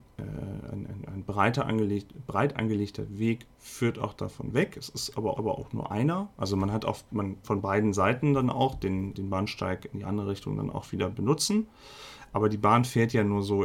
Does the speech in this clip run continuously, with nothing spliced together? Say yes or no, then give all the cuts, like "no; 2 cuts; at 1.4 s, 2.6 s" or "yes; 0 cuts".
no; 3 cuts; at 5.3 s, 7.4 s, 9.1 s